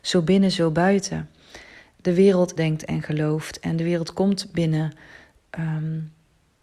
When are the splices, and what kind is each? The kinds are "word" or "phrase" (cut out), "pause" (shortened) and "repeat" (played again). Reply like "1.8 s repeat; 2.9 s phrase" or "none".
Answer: 2.6 s phrase